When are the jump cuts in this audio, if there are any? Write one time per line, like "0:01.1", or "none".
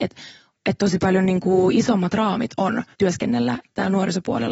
0:02.9